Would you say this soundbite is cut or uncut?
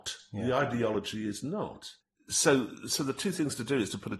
uncut